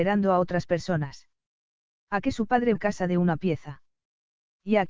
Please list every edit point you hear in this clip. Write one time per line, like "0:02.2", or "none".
0:02.7